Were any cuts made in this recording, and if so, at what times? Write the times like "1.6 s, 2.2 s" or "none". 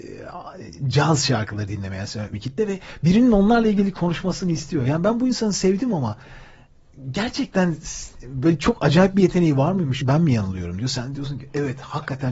2.3 s, 10.0 s